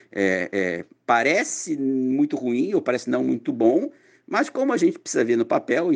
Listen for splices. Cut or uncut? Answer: uncut